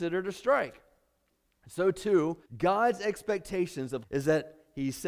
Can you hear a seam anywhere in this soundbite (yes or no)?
yes